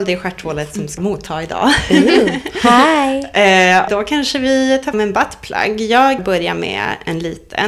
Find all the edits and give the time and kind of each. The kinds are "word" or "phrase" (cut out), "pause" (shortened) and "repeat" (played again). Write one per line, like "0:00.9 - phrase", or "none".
0:01.0 - word
0:03.9 - word
0:04.9 - word
0:06.2 - word